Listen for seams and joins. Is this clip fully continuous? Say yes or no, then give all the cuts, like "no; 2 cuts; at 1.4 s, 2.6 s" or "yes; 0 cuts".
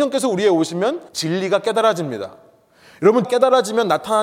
no; 2 cuts; at 1.1 s, 3.2 s